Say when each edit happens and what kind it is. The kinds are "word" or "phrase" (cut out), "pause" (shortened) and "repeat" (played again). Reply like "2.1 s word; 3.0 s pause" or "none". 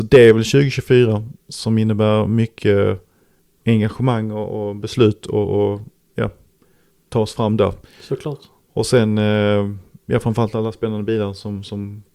none